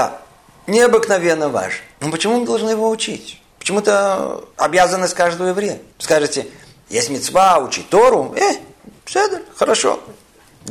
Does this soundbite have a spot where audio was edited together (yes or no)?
yes